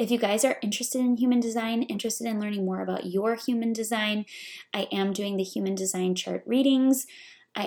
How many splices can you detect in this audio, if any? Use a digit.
0